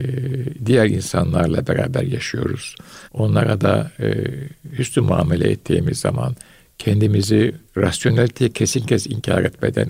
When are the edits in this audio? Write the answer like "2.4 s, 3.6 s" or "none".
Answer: 3.0 s, 7.7 s